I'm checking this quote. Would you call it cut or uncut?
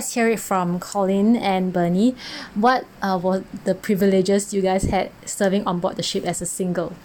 uncut